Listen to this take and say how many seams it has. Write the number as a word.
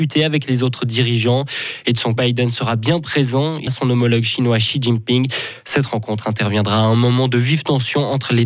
two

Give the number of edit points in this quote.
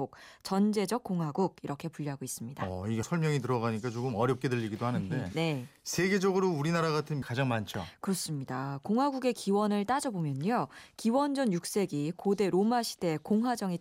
two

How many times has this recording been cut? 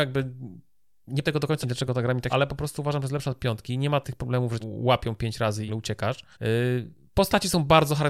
seven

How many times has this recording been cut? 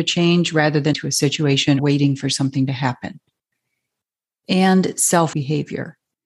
three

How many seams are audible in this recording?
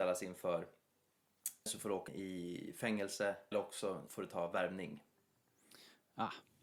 four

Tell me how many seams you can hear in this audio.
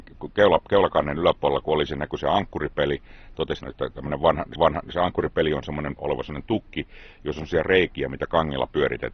three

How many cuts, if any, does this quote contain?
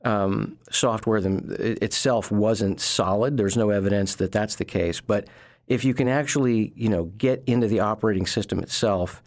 zero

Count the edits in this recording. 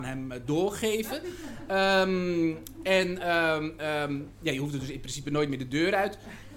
zero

